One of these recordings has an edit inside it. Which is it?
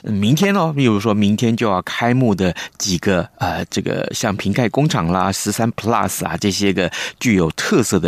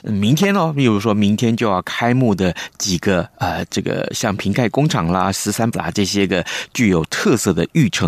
second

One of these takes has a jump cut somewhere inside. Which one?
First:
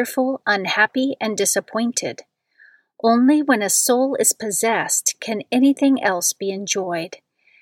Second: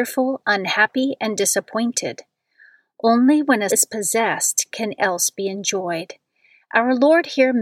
second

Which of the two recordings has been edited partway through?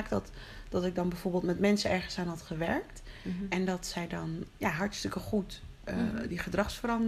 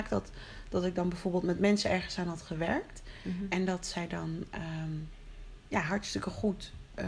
first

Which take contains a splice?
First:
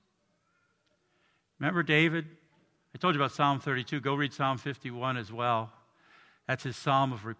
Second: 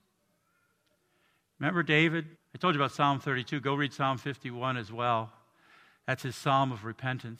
second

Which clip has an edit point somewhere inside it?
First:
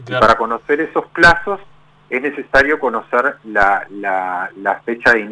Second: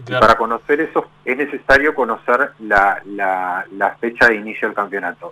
second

